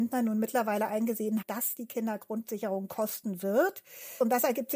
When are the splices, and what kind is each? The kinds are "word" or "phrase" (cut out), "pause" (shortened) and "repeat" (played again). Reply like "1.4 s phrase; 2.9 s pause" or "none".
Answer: 1.4 s word; 2.9 s word